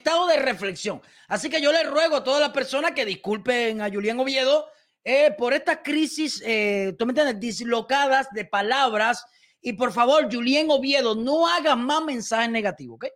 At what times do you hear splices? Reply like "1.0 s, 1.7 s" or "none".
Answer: none